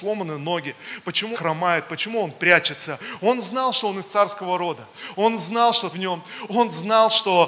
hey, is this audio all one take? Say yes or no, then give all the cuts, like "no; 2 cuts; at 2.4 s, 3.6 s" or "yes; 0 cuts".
no; 2 cuts; at 1.3 s, 5.9 s